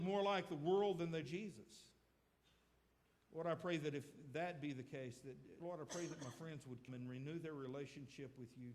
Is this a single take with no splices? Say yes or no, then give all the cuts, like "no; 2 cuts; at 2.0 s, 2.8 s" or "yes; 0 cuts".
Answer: no; 3 cuts; at 1.2 s, 5.6 s, 6.9 s